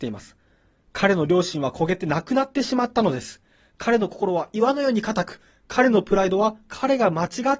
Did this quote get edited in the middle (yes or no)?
no